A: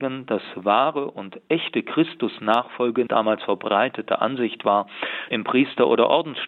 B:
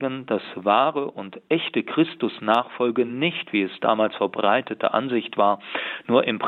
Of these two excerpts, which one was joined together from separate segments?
A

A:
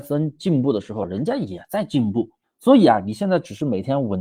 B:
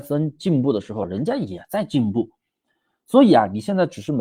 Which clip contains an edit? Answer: A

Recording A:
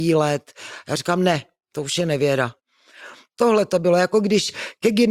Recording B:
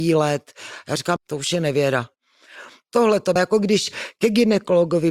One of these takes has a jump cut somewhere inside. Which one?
B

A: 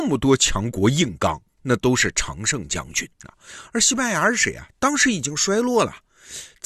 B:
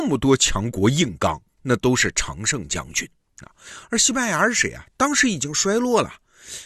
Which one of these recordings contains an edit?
A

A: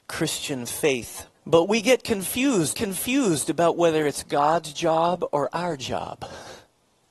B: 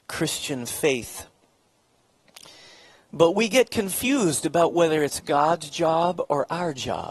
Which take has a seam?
A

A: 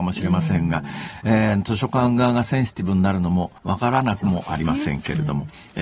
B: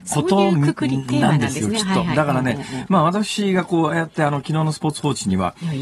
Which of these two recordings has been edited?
A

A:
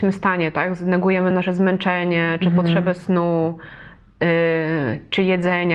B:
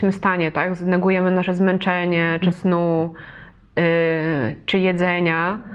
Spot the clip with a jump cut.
B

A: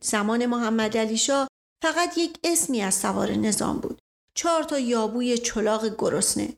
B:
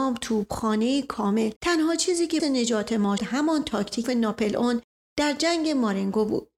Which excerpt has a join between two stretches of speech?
B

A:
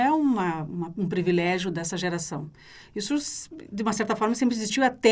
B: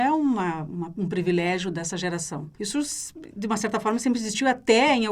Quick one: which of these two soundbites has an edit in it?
B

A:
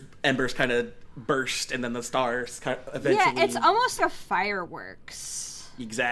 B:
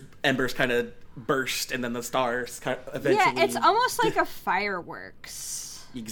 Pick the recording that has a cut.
A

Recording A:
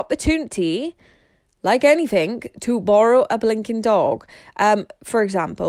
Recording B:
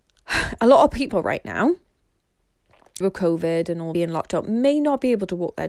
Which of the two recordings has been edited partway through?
B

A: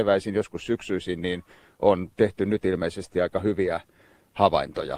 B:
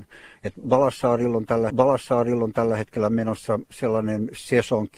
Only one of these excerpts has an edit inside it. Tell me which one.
B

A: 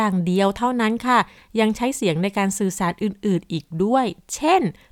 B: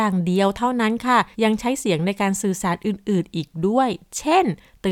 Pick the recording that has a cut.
B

